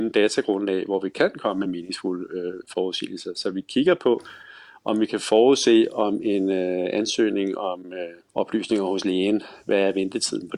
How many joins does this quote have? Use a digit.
0